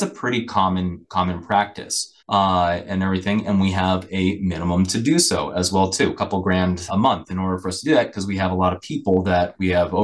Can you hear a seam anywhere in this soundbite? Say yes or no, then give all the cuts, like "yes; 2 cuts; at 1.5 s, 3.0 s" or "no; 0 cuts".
yes; 2 cuts; at 2.2 s, 6.9 s